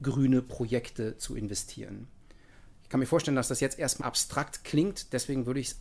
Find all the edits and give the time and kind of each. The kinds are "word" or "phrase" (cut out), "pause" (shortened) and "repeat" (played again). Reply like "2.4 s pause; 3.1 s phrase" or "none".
4.0 s word